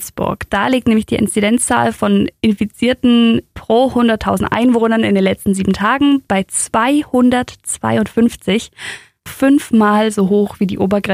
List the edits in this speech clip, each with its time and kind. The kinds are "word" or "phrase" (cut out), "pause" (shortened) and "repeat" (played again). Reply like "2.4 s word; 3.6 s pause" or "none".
9.3 s word